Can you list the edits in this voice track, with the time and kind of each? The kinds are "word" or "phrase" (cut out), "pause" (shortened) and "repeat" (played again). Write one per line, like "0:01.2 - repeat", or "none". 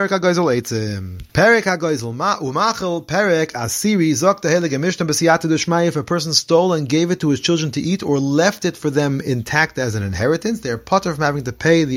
0:01.3 - pause